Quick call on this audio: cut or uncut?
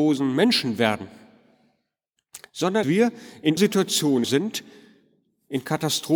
cut